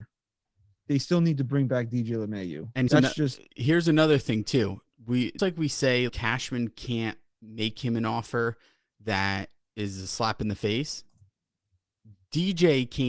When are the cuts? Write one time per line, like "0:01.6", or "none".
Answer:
0:02.9
0:05.4
0:06.1